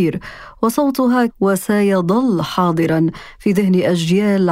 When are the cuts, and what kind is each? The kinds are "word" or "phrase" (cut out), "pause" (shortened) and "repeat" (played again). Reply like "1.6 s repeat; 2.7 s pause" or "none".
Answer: 1.3 s word